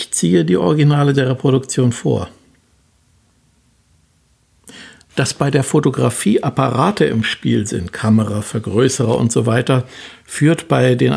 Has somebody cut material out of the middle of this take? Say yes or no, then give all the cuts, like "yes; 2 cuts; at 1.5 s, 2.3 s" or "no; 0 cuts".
no; 0 cuts